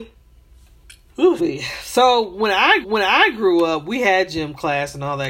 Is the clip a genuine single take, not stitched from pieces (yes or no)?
no